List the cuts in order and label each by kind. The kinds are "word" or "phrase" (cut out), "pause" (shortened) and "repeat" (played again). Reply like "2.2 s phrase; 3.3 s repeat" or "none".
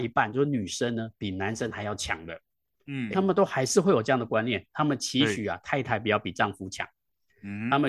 3.1 s word

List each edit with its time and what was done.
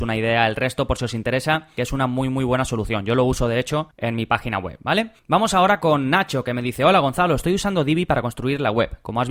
5.2 s pause

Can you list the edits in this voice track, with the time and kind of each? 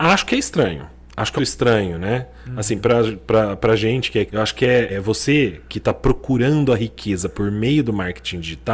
1.4 s phrase; 4.3 s word; 4.9 s word

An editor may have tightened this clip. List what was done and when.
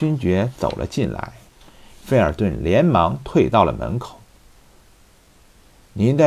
none

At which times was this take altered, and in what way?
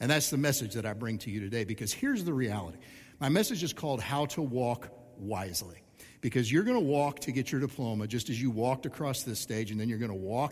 none

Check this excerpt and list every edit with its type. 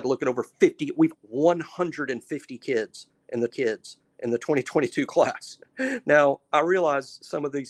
1.1 s phrase; 3.5 s repeat

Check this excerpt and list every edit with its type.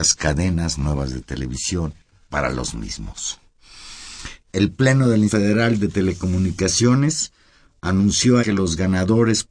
2.3 s word; 5.3 s word; 8.4 s word

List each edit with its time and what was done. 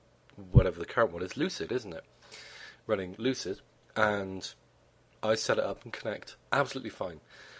3.7 s pause; 5.9 s word; 6.4 s pause

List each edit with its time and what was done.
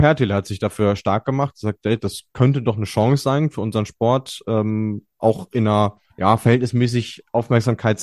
6.1 s pause

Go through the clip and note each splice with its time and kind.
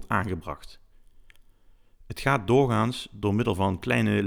none

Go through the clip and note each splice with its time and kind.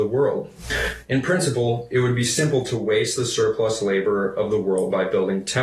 none

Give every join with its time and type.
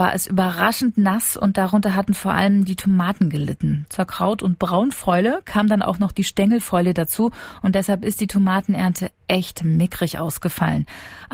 none

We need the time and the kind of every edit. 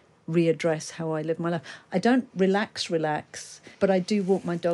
3.7 s pause

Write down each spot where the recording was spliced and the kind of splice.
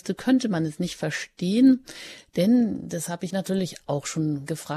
3.3 s word

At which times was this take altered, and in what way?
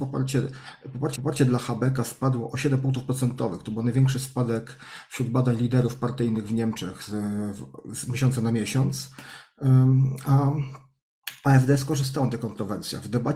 1.2 s repeat

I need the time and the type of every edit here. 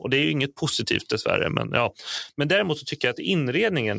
none

